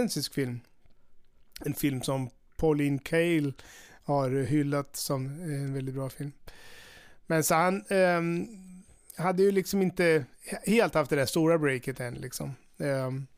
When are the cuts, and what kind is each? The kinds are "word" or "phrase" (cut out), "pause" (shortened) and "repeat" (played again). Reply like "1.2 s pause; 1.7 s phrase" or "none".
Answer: none